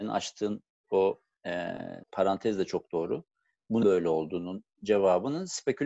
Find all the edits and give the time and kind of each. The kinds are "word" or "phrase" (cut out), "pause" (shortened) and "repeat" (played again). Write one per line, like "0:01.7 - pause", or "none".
0:02.0 - pause
0:03.8 - word